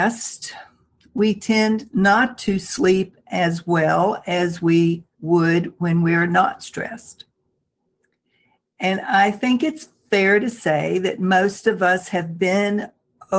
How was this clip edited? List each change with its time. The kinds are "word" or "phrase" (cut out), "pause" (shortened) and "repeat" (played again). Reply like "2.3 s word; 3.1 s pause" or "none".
5.1 s pause